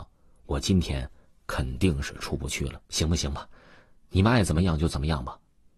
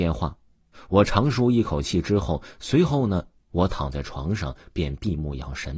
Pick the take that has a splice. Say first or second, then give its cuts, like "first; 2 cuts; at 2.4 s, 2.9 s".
first; 1 cut; at 2.9 s